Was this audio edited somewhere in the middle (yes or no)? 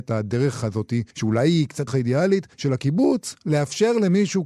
yes